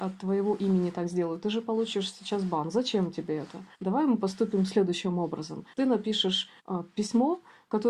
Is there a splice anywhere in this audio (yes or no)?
yes